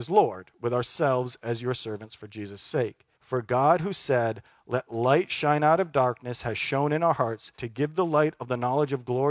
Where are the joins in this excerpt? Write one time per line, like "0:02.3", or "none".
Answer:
0:03.1
0:07.5